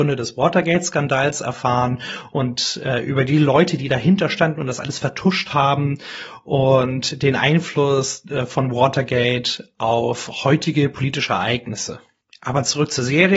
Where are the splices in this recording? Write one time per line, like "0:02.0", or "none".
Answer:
none